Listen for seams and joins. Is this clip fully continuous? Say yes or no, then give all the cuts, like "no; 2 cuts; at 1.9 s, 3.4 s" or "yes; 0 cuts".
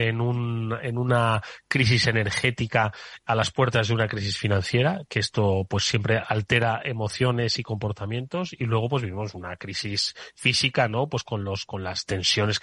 yes; 0 cuts